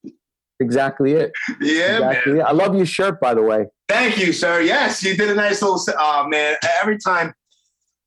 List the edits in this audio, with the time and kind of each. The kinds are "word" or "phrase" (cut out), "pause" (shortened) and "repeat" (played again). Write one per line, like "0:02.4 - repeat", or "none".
0:03.8 - pause

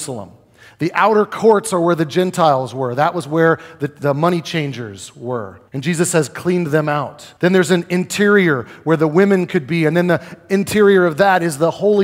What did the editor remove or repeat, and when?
0:05.7 - pause
0:07.4 - pause

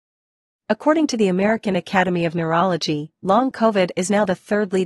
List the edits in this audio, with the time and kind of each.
none

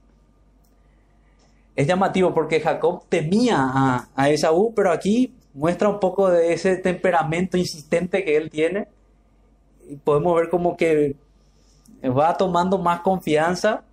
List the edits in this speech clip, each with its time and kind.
0:05.4 - pause

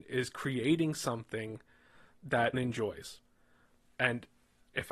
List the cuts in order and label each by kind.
0:02.5 - word

